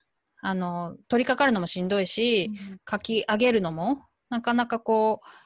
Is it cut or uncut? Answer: cut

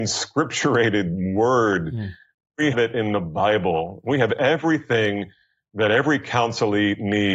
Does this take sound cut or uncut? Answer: cut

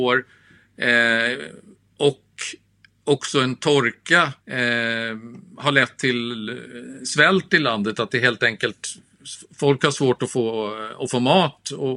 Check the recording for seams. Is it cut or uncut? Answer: cut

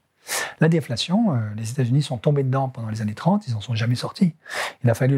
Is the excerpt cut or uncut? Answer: uncut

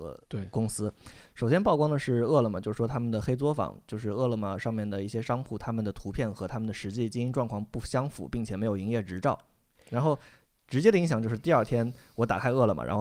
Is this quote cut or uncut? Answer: uncut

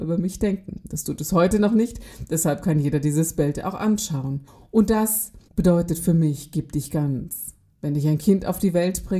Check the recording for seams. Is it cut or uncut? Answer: cut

